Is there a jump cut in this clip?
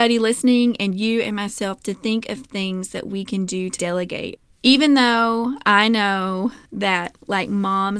yes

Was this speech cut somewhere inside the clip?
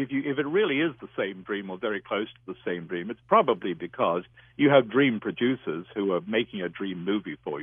no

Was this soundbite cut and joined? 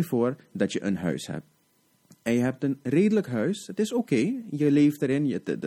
no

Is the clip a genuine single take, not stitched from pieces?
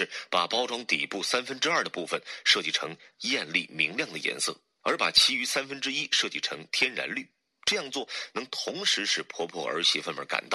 yes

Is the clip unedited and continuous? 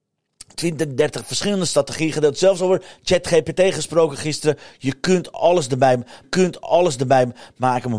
no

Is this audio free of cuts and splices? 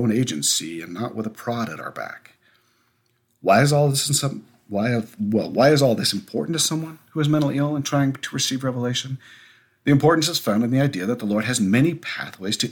yes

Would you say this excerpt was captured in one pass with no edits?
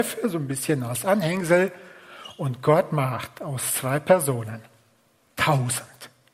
yes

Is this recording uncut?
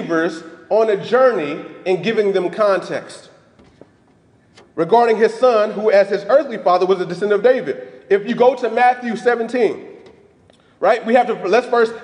yes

